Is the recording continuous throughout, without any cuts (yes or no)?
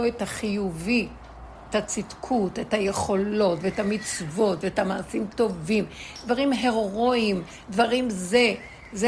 yes